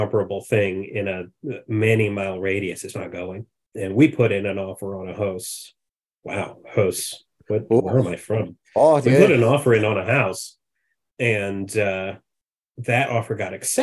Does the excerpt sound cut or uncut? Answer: cut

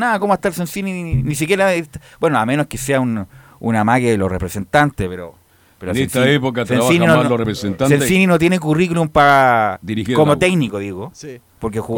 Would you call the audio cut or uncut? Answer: uncut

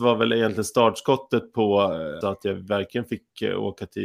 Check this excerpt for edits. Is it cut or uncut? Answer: cut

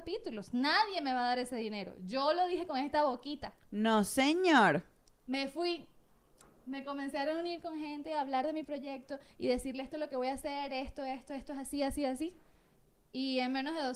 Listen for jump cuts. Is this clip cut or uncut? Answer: uncut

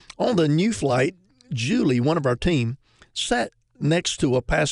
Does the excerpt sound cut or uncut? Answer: uncut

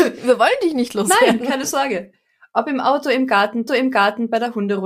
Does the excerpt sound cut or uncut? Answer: cut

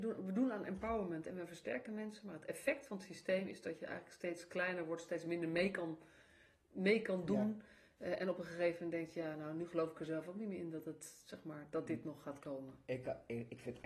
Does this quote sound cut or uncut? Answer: uncut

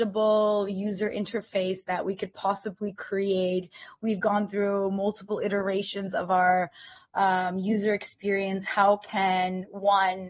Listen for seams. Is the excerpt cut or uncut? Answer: uncut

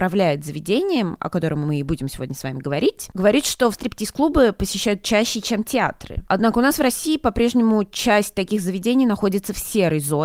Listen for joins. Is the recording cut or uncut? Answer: cut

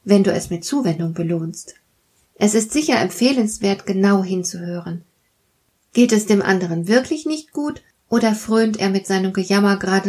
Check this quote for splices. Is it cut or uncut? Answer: uncut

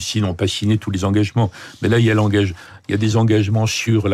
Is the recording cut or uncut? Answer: uncut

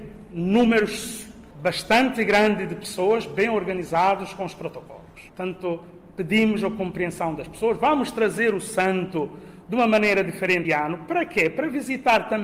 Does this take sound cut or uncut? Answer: cut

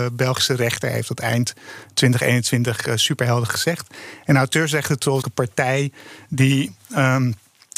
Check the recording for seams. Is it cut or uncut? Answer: cut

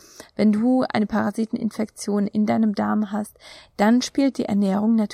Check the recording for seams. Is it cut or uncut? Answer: uncut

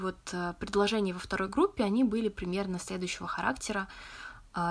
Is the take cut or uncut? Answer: uncut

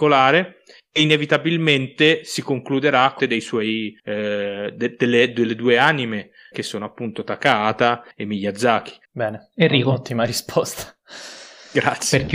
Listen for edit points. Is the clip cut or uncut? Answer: cut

